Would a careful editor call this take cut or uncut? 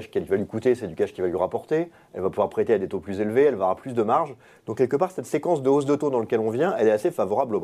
uncut